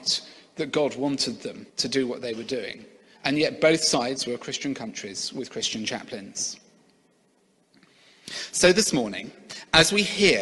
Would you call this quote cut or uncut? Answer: cut